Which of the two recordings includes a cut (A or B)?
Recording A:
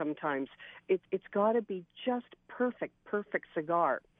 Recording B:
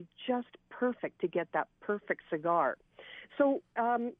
A